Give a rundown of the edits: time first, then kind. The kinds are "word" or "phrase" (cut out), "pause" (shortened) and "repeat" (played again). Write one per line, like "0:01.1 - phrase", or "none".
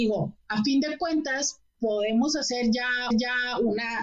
0:03.1 - repeat